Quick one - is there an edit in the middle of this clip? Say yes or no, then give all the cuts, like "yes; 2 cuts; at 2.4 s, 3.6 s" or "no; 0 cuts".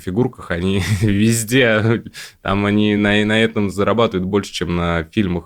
no; 0 cuts